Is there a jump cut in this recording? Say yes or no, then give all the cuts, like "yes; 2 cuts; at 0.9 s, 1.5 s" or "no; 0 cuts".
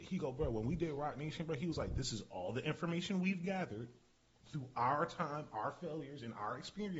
no; 0 cuts